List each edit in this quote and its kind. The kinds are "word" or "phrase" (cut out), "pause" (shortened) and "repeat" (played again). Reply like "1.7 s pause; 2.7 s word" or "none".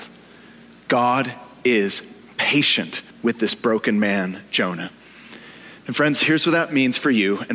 3.1 s pause; 5.8 s pause